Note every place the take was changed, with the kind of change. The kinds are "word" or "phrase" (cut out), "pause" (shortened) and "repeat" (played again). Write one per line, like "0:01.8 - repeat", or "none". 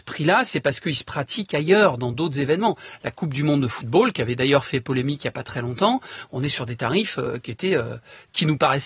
none